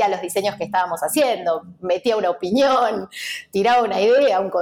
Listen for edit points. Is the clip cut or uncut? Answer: uncut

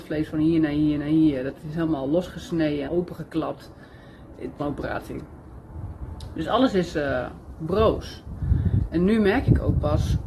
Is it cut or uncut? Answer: cut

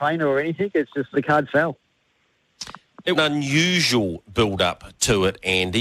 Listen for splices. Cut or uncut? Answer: cut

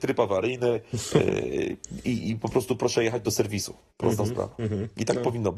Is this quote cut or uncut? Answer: uncut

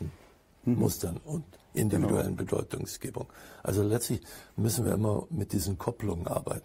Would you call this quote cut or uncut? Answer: uncut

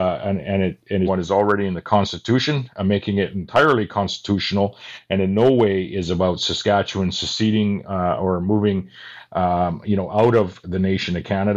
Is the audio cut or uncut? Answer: cut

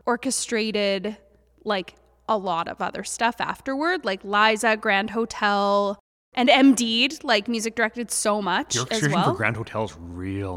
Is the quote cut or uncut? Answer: uncut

